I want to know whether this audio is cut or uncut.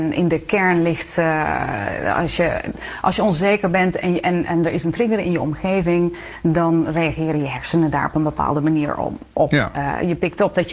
uncut